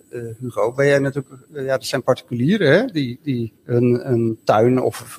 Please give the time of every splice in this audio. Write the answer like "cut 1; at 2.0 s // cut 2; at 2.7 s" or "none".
cut 1; at 3.6 s